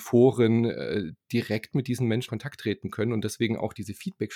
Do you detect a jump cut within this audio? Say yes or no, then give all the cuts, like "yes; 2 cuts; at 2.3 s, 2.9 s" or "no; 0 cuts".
yes; 1 cut; at 2.3 s